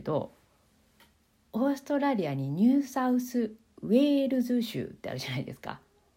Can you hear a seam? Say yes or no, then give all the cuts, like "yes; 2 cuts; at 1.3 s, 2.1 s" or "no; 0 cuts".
no; 0 cuts